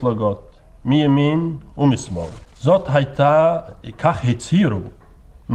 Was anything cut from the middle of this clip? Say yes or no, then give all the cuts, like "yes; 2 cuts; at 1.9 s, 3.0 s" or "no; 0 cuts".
yes; 1 cut; at 2.4 s